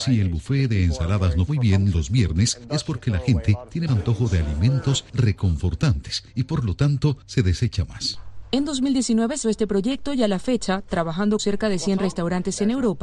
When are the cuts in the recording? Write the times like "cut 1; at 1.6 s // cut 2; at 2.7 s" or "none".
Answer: cut 1; at 1.5 s // cut 2; at 3.9 s // cut 3; at 9.4 s // cut 4; at 11.4 s